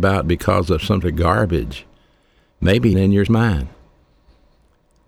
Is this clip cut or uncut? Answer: cut